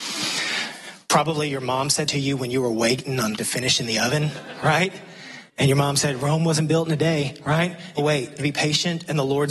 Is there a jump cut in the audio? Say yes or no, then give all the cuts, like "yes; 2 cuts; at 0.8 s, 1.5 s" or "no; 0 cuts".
yes; 6 cuts; at 1.0 s, 2.1 s, 3.4 s, 5.5 s, 8.0 s, 8.4 s